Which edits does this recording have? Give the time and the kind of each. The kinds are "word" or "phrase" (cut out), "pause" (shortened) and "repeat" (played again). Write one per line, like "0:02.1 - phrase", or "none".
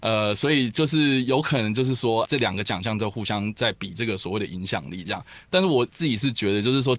0:02.2 - word